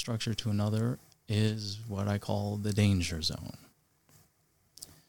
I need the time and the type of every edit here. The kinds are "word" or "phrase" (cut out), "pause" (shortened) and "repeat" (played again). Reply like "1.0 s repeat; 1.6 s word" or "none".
none